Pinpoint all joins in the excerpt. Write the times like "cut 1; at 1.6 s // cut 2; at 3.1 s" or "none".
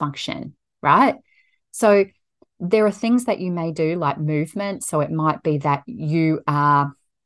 none